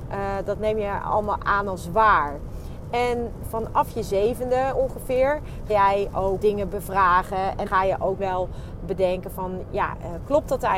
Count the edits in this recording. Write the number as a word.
four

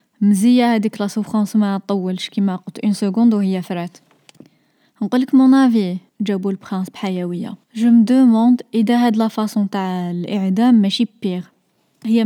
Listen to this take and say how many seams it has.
two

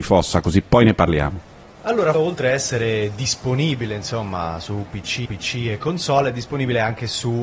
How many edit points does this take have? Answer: two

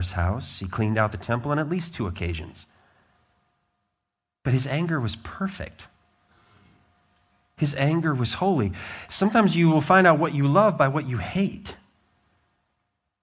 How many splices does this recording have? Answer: zero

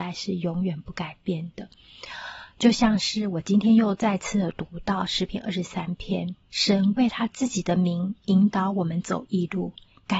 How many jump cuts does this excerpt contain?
one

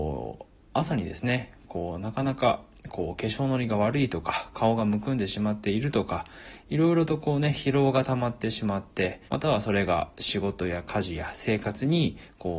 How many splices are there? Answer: one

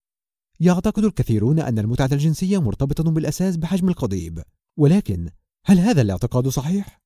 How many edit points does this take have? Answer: zero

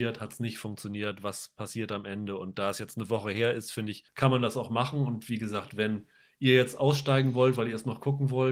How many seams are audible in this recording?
zero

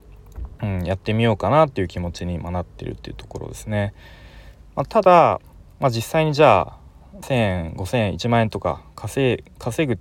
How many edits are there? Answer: one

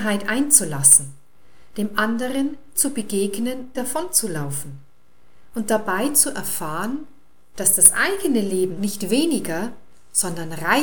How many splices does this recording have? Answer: three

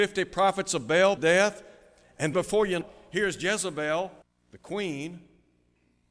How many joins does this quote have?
four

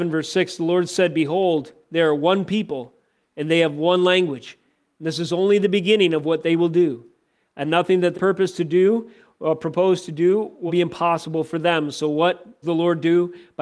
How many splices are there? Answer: three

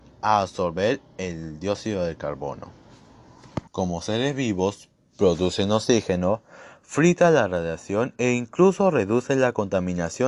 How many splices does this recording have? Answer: one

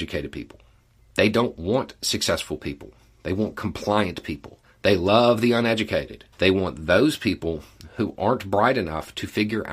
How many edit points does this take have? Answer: two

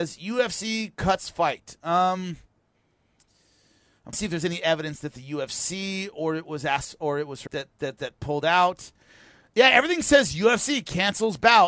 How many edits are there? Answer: two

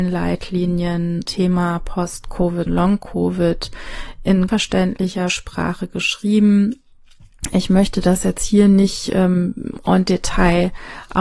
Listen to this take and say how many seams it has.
three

